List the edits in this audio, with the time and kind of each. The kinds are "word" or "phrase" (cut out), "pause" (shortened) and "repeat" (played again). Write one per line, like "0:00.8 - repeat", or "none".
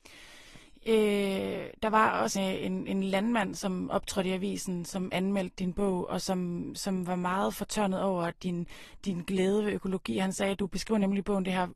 0:02.4 - word